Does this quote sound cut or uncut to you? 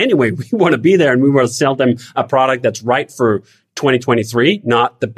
uncut